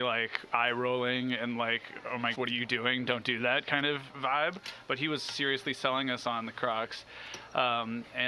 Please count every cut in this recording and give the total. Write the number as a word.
one